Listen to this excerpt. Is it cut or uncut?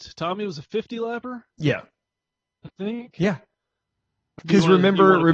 cut